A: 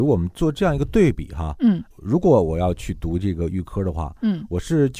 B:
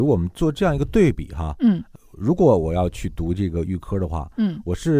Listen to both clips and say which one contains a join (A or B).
A